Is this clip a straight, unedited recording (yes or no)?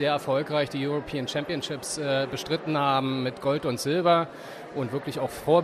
yes